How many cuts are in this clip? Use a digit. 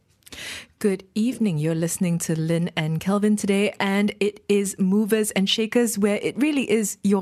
0